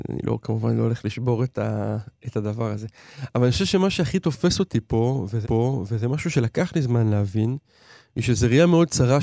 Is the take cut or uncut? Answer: cut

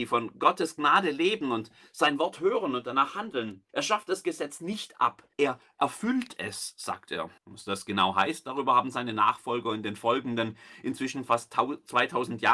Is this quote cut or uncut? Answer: cut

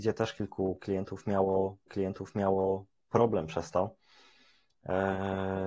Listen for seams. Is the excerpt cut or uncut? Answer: cut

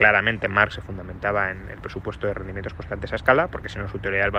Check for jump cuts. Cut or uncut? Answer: uncut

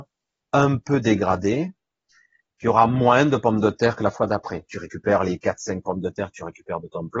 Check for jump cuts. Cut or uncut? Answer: uncut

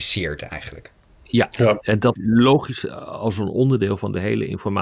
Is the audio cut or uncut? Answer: cut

